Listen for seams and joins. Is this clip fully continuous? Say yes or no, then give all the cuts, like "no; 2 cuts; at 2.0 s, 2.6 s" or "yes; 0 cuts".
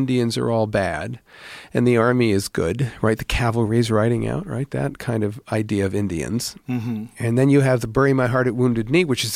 yes; 0 cuts